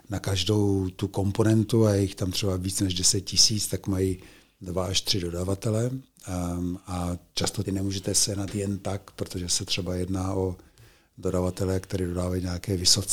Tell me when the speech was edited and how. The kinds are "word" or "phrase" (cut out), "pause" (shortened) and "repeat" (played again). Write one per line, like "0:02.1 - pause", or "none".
0:07.6 - phrase